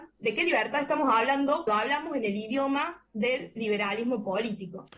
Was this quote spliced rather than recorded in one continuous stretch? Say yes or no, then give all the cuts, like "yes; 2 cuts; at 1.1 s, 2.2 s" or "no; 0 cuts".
yes; 1 cut; at 1.7 s